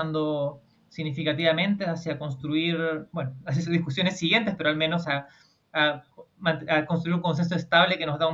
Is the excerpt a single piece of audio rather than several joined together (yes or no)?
yes